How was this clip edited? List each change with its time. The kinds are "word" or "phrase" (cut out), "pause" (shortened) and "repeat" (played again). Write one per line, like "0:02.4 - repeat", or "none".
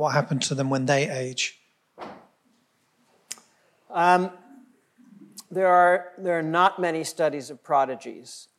none